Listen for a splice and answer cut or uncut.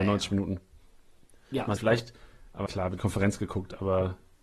cut